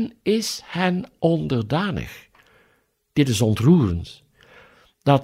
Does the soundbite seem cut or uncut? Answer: uncut